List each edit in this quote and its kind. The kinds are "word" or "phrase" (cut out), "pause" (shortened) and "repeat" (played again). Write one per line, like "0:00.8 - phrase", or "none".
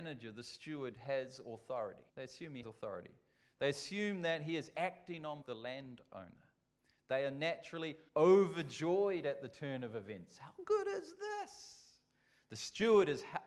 0:02.1 - pause
0:02.6 - word
0:05.4 - phrase
0:08.1 - pause

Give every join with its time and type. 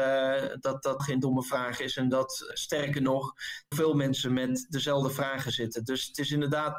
0:01.0 - word
0:02.5 - word
0:03.7 - word

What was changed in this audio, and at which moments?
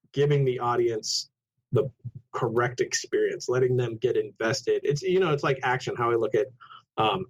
none

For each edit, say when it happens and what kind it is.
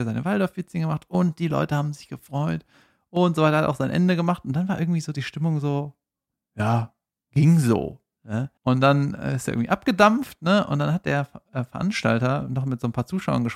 0:08.6 - pause

